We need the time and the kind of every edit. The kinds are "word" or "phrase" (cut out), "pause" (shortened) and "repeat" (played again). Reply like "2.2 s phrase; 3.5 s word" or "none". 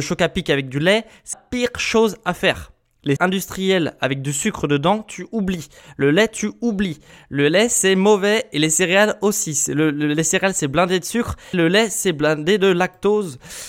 1.3 s word; 3.2 s word; 11.5 s word